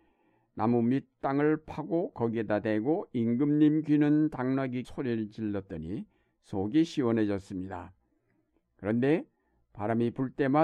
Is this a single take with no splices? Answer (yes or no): no